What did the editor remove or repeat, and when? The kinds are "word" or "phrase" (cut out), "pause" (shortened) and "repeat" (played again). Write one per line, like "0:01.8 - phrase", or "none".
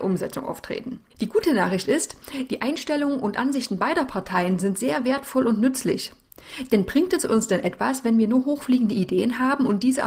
0:01.1 - pause